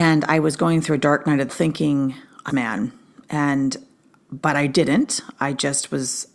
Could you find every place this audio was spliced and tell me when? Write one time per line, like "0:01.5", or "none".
0:01.5
0:02.5